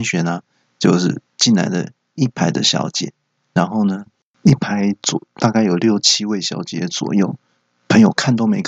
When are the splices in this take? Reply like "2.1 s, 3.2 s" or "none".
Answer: none